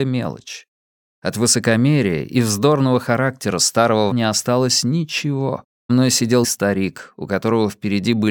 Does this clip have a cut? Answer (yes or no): yes